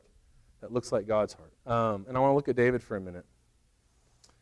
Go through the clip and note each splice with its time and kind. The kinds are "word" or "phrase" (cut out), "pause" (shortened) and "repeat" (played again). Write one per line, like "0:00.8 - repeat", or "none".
0:01.6 - pause